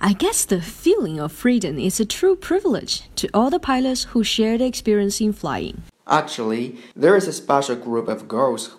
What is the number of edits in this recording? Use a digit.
1